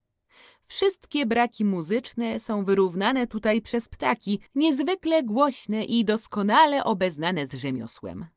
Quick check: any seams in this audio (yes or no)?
yes